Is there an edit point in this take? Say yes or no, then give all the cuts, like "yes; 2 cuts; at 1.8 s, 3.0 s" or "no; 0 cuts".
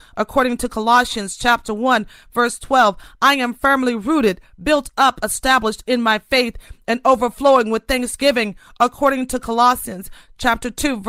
no; 0 cuts